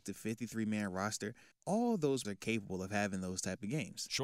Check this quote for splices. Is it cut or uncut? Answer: cut